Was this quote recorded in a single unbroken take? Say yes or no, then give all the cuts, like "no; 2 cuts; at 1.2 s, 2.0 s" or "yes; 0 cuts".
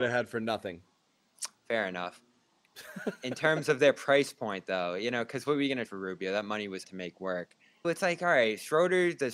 no; 3 cuts; at 5.9 s, 6.8 s, 7.8 s